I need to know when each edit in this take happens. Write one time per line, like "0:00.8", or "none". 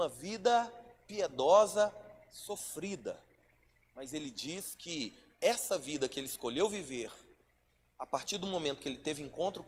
none